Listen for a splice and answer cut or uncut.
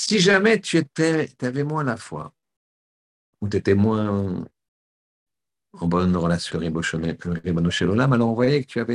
cut